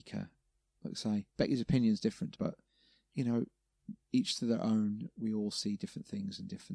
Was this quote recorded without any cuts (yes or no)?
no